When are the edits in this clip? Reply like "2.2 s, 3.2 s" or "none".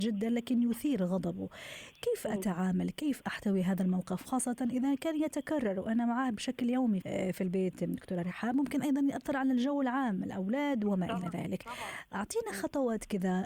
3.2 s, 7.0 s